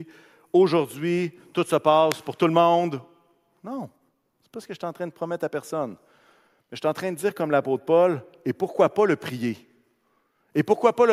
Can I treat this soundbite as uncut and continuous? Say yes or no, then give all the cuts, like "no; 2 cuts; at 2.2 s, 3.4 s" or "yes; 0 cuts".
yes; 0 cuts